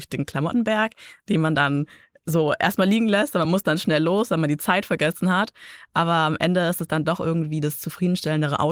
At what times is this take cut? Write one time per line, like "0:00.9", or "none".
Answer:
none

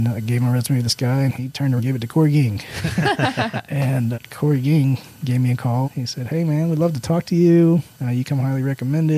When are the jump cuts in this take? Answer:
0:01.8
0:04.1
0:05.8

